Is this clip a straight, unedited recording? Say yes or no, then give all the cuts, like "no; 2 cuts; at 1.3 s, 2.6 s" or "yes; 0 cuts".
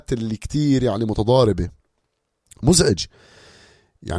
yes; 0 cuts